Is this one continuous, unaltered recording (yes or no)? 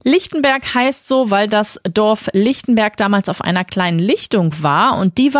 yes